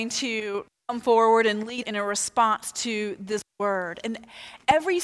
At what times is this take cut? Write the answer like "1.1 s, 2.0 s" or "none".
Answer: 1.8 s